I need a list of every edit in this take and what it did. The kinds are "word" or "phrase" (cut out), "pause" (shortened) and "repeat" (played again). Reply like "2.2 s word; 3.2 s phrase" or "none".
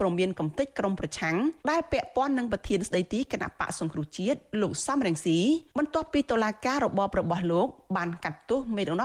1.6 s pause; 5.7 s pause